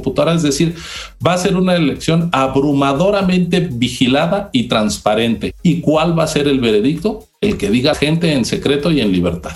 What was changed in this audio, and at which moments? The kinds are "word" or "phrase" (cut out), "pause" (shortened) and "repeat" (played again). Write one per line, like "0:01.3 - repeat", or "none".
0:07.9 - word